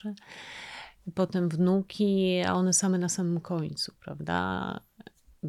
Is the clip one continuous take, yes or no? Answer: yes